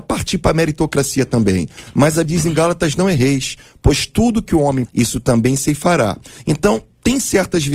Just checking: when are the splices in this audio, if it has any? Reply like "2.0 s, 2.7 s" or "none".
2.2 s, 4.9 s